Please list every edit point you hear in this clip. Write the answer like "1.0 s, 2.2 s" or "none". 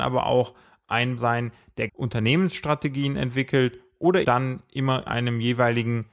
1.2 s, 1.9 s, 4.2 s, 5.1 s

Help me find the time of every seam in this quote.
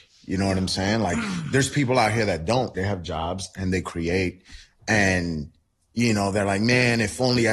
2.7 s

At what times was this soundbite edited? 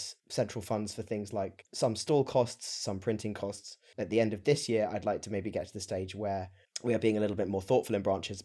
none

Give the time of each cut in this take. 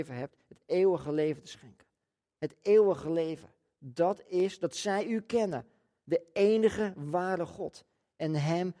none

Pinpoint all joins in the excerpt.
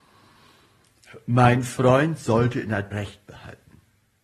2.9 s

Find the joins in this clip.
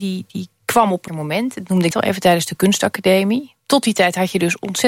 1.1 s, 1.9 s

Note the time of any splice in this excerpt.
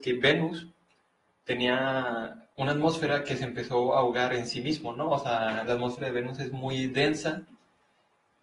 2.5 s

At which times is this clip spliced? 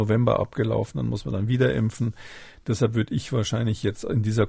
none

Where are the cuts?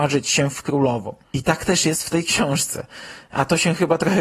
1.2 s

